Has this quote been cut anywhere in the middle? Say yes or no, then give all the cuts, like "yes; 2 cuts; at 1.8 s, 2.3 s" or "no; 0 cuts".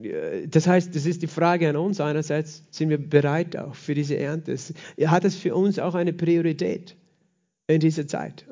no; 0 cuts